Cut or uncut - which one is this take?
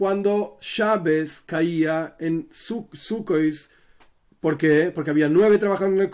uncut